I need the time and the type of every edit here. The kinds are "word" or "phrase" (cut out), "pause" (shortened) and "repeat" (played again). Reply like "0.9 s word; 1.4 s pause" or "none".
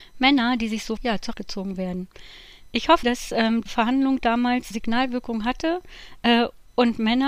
1.0 s word; 1.3 s word; 3.0 s word; 3.7 s word; 4.7 s word